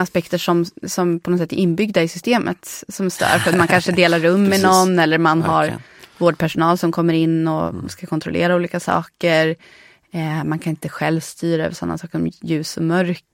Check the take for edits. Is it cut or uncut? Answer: uncut